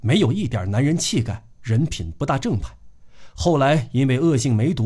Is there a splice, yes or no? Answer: yes